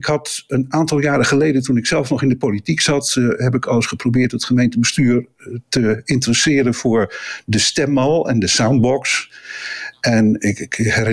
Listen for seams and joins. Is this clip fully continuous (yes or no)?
yes